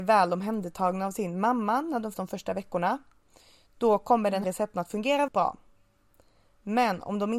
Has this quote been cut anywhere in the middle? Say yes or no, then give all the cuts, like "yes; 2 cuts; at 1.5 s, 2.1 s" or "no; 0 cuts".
yes; 3 cuts; at 2.1 s, 4.4 s, 5.3 s